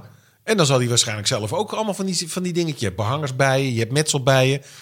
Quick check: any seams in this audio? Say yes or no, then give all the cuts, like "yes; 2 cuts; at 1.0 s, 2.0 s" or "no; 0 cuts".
no; 0 cuts